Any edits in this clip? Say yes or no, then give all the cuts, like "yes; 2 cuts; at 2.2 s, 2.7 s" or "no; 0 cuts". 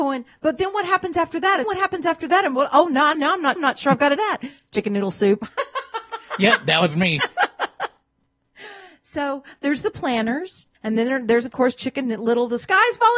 yes; 5 cuts; at 1.6 s, 3.1 s, 3.6 s, 4.2 s, 10.7 s